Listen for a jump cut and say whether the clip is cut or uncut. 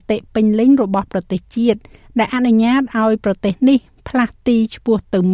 uncut